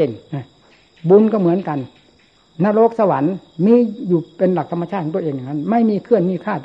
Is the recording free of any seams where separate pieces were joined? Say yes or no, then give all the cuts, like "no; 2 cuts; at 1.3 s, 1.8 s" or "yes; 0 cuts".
yes; 0 cuts